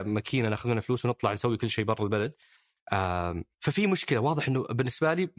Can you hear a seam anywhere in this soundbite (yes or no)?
yes